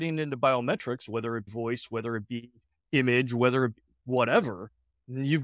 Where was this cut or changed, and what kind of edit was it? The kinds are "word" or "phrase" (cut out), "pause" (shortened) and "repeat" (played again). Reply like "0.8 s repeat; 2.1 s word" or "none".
1.5 s word